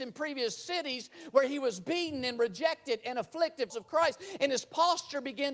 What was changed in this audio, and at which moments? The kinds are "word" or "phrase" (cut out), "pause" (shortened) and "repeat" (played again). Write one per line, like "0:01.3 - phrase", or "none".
0:03.7 - phrase